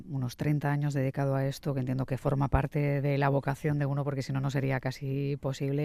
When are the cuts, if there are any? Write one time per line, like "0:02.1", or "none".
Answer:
none